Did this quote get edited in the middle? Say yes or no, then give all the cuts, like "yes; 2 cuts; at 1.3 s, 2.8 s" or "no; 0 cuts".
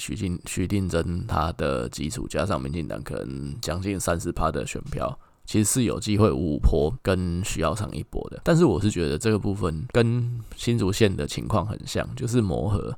no; 0 cuts